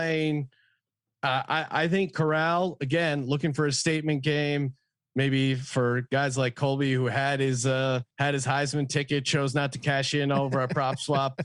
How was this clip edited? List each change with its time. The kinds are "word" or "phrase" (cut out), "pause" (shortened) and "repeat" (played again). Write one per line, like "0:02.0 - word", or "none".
0:08.1 - pause